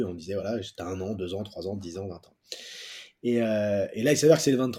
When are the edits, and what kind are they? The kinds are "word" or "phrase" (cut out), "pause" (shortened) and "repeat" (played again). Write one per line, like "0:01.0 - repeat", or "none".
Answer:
none